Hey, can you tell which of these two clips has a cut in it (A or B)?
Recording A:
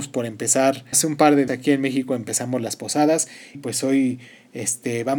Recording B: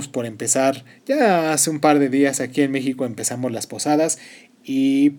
A